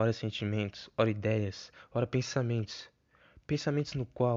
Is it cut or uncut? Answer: uncut